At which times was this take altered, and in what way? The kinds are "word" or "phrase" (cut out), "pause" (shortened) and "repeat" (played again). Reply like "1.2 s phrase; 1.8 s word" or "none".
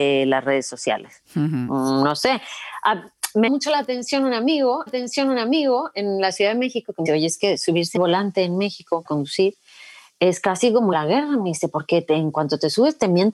3.5 s word; 4.9 s repeat; 7.1 s word; 8.0 s word; 9.1 s word; 10.9 s phrase